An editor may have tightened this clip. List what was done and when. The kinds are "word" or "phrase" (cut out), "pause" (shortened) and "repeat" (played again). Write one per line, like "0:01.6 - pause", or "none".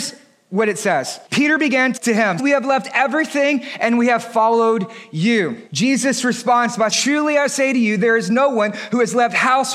0:01.3 - pause
0:02.0 - word
0:02.4 - word
0:05.7 - pause
0:06.9 - word